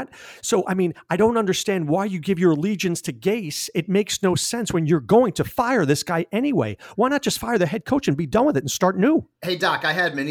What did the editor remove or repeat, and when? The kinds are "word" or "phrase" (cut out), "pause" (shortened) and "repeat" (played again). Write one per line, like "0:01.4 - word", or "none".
none